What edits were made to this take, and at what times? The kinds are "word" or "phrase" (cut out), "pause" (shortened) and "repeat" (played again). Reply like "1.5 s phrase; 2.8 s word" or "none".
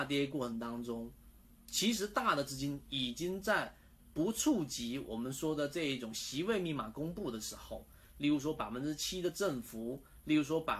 none